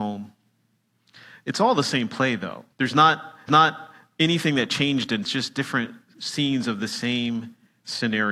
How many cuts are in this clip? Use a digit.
3